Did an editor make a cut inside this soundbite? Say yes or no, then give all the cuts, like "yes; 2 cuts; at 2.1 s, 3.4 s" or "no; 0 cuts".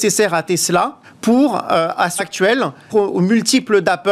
yes; 3 cuts; at 1.0 s, 2.2 s, 2.9 s